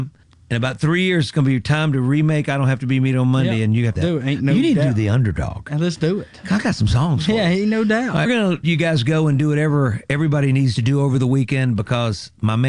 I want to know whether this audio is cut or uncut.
cut